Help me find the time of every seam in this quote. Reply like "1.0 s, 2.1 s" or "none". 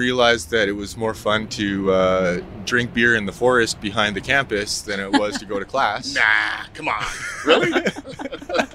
none